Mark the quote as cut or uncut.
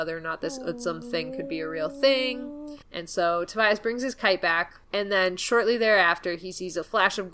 cut